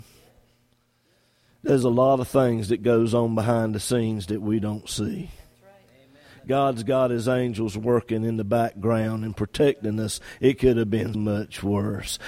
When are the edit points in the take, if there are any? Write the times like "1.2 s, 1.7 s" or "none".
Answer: 11.1 s